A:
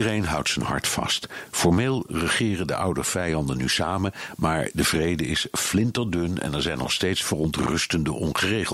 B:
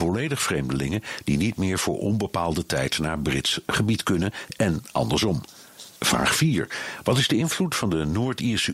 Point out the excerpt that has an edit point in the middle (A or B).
B